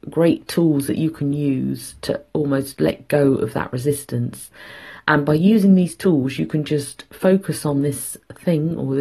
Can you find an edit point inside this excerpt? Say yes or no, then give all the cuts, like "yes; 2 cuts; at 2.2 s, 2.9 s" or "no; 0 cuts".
no; 0 cuts